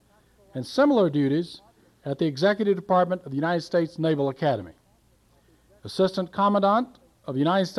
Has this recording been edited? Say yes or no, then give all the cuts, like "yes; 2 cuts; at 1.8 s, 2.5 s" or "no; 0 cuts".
no; 0 cuts